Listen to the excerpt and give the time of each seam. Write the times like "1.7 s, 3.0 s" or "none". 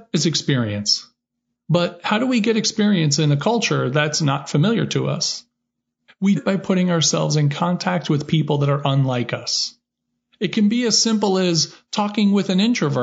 6.4 s